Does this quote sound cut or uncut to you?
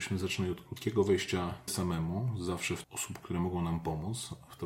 cut